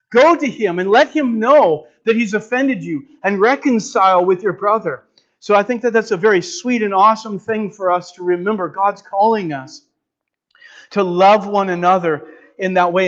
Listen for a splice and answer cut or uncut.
uncut